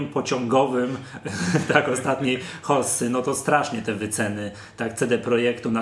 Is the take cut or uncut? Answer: uncut